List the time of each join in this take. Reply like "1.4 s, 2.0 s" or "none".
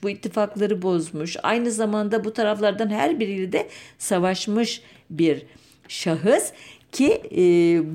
none